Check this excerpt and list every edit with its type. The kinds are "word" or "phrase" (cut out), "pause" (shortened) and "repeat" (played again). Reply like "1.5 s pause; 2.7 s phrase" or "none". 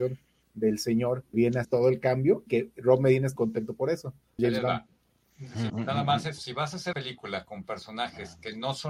1.3 s word; 1.6 s word; 2.5 s word; 3.4 s word; 4.4 s word; 5.7 s word; 6.4 s word; 6.9 s word